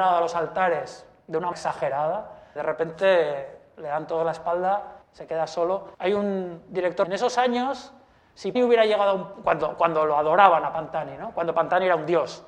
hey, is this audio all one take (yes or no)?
no